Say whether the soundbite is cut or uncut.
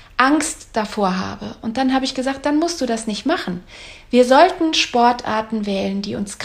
uncut